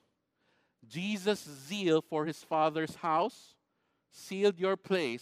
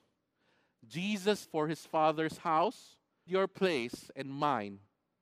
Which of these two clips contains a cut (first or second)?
second